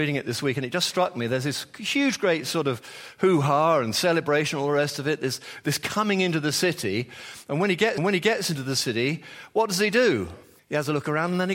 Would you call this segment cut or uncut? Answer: cut